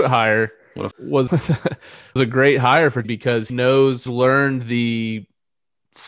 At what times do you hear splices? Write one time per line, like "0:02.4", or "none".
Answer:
0:00.9
0:01.3
0:02.2
0:03.0
0:03.5
0:04.1